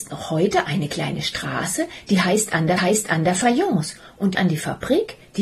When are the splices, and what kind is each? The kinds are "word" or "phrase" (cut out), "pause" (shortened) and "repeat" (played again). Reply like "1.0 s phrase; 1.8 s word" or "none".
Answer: 2.8 s repeat; 4.3 s word